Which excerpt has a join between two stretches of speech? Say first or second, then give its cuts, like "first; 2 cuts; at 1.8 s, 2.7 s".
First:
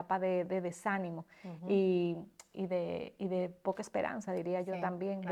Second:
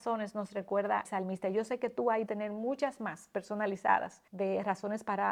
second; 3 cuts; at 1.1 s, 2.3 s, 4.3 s